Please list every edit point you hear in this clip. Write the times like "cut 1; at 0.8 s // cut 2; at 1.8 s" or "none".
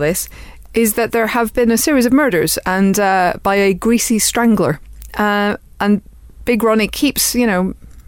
none